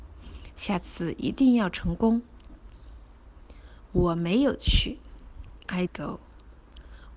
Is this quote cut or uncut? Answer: cut